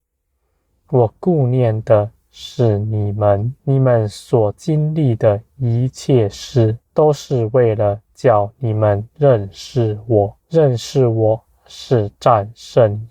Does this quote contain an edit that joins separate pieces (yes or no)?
yes